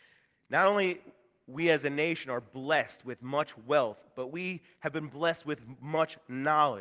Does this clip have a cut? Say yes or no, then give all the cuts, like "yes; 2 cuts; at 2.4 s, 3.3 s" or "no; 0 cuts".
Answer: no; 0 cuts